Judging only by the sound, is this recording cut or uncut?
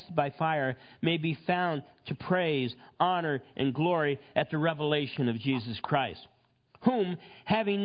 uncut